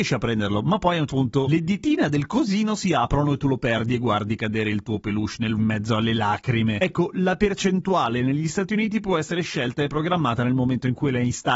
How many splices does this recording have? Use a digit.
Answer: 2